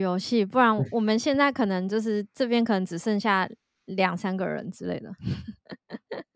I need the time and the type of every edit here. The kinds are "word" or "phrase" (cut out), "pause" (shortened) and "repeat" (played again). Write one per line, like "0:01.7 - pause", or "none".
none